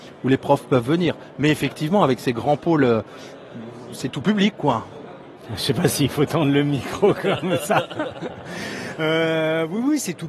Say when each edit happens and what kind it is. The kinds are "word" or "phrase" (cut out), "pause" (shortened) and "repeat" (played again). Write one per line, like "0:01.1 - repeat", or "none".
0:05.4 - pause